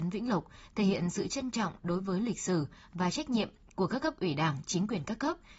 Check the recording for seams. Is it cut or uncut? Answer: uncut